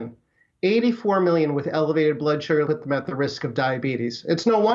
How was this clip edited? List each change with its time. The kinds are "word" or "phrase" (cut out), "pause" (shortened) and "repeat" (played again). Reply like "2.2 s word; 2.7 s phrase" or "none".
2.7 s phrase